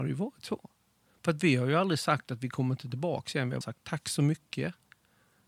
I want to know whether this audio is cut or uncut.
cut